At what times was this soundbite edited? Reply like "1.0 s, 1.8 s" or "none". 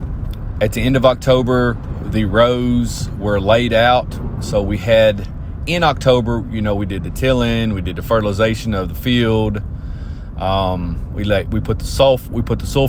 none